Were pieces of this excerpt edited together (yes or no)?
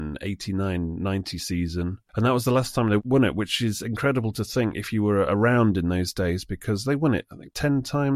no